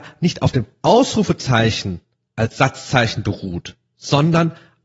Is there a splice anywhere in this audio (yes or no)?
yes